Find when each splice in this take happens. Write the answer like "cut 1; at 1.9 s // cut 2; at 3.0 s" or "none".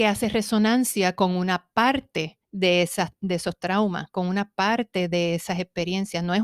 cut 1; at 2.4 s